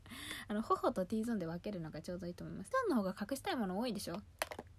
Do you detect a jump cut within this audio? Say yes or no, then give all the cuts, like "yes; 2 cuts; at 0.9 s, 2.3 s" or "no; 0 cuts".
yes; 1 cut; at 2.7 s